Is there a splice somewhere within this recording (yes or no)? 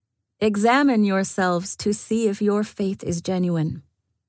no